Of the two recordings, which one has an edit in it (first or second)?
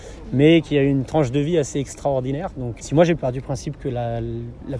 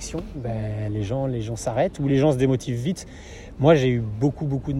first